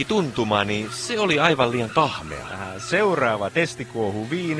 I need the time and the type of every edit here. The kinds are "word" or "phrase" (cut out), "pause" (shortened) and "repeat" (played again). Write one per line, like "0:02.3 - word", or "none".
none